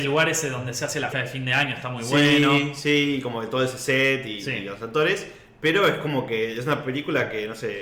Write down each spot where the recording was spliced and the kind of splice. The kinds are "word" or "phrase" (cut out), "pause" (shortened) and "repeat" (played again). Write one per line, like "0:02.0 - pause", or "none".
0:01.1 - word